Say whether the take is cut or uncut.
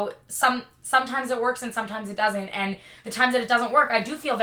uncut